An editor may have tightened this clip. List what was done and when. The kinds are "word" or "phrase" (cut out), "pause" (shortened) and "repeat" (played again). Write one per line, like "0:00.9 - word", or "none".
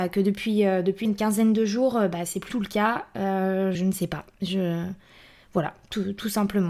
0:01.0 - word
0:02.5 - word
0:03.7 - word